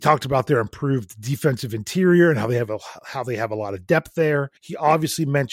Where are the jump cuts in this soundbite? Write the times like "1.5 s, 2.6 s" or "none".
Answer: 4.6 s